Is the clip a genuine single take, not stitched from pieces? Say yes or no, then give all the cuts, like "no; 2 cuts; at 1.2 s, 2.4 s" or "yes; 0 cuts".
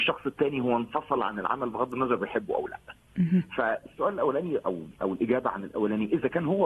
yes; 0 cuts